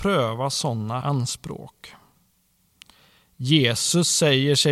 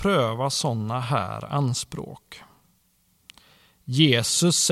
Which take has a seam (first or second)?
first